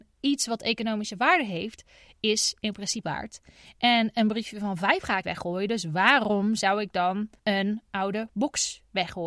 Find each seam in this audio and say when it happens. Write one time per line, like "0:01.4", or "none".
0:03.0
0:05.2
0:07.4